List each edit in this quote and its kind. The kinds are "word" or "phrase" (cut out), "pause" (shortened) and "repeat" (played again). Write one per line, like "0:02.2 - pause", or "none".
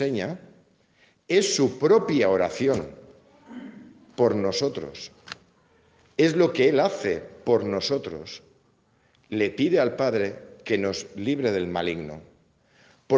none